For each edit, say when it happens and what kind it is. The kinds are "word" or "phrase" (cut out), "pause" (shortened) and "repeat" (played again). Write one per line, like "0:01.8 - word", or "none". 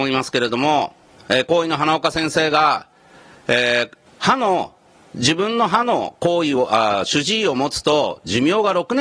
0:04.1 - pause